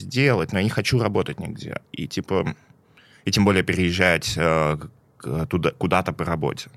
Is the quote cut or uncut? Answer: uncut